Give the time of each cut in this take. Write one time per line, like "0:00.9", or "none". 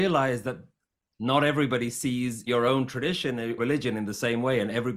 0:02.5
0:03.6